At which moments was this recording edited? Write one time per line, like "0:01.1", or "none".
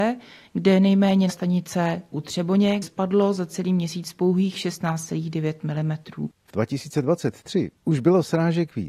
0:01.3
0:02.1
0:02.8
0:06.5